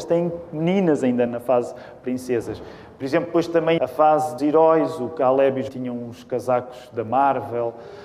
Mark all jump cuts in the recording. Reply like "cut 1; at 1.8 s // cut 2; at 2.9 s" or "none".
cut 1; at 1.3 s // cut 2; at 3.8 s // cut 3; at 4.4 s // cut 4; at 5.7 s